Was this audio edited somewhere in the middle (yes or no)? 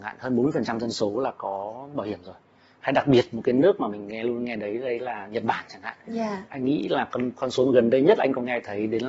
no